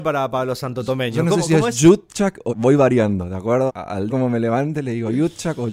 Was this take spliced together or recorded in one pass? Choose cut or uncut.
cut